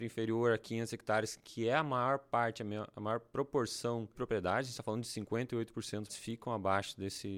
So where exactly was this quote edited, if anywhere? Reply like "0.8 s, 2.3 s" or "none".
4.1 s, 6.1 s